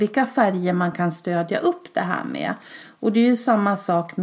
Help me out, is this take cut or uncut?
uncut